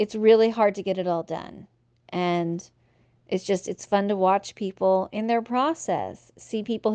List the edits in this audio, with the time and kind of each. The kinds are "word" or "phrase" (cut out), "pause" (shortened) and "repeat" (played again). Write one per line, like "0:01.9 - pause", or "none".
none